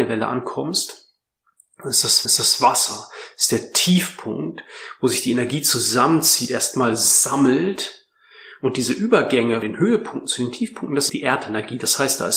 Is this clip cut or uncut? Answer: cut